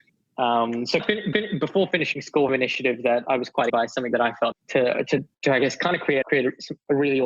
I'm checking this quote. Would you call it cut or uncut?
cut